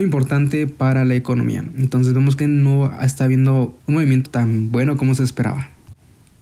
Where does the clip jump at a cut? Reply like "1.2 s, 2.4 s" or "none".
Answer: 2.4 s, 3.8 s, 4.3 s